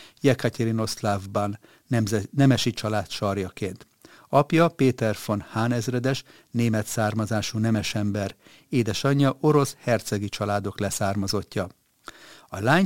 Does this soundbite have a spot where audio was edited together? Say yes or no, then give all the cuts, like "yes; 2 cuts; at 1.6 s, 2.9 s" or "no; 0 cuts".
no; 0 cuts